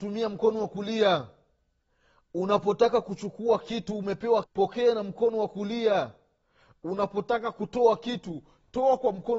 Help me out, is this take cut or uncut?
cut